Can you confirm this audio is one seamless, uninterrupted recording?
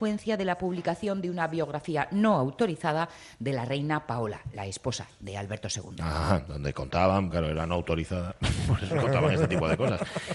no; 1 cut; at 7.3 s

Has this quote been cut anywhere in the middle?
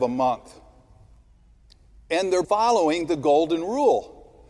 yes; 1 cut; at 2.4 s

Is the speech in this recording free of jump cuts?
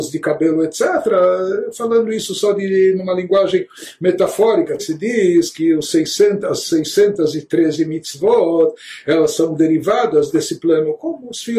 no; 1 cut; at 4.8 s

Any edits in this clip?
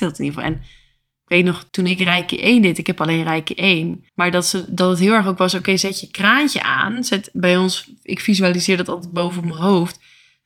yes; 2 cuts; at 1.7 s, 4.1 s

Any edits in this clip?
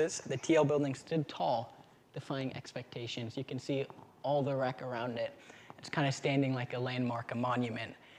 no; 0 cuts

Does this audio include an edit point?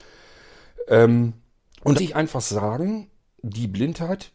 yes; 2 cuts; at 1.5 s, 2.0 s

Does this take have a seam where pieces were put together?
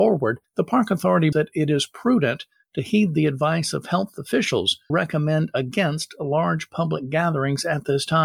yes; 2 cuts; at 1.3 s, 4.9 s

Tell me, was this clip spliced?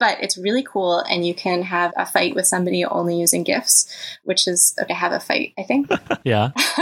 yes; 2 cuts; at 1.9 s, 4.9 s

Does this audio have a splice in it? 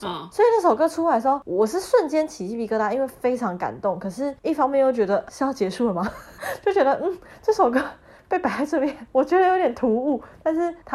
yes; 1 cut; at 5.3 s

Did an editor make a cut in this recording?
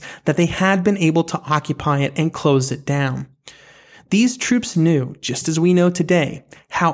no; 0 cuts

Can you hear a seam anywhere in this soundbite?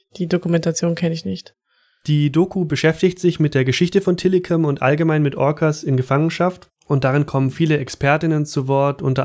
yes; 1 cut; at 6.8 s

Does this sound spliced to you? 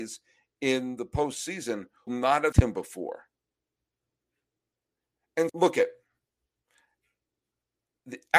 yes; 3 cuts; at 2.1 s, 2.5 s, 5.5 s

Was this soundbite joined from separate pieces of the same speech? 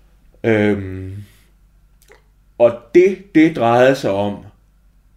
no; 0 cuts

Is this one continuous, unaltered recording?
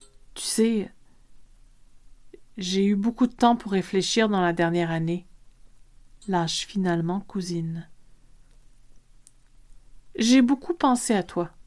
yes; 0 cuts

